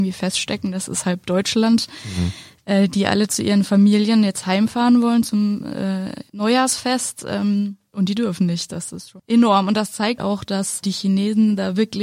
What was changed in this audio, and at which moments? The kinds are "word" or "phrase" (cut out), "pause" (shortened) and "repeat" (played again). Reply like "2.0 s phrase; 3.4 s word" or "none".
6.3 s pause; 10.2 s word